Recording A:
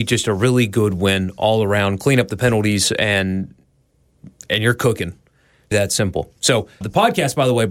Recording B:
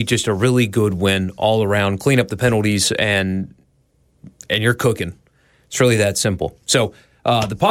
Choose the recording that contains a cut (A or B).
A